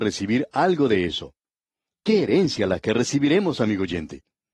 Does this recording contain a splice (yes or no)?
no